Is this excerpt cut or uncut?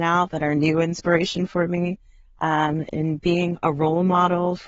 uncut